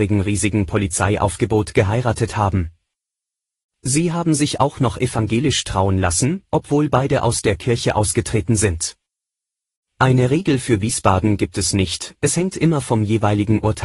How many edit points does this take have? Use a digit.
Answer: 0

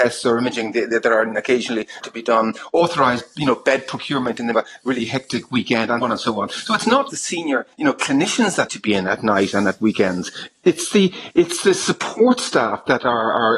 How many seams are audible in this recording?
6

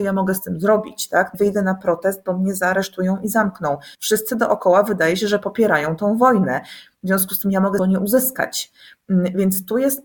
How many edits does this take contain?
3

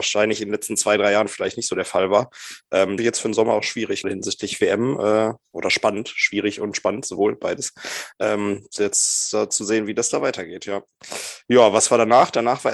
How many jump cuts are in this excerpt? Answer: 2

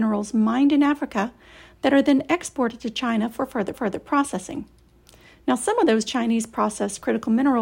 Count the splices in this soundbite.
1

